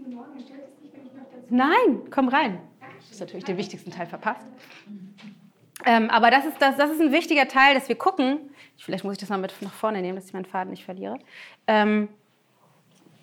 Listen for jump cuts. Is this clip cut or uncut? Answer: uncut